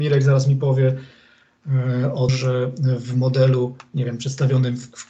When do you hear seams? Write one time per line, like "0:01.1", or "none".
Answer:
0:02.3